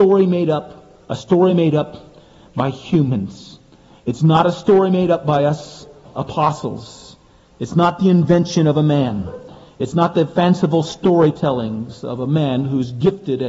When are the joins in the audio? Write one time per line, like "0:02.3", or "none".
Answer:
none

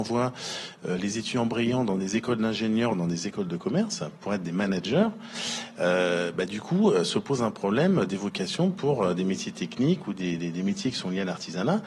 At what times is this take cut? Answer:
none

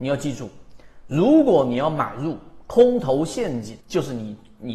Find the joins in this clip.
0:03.8

